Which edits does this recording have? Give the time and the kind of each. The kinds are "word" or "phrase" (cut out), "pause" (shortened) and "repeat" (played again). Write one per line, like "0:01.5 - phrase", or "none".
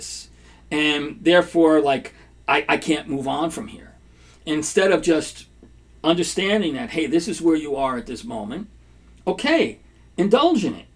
none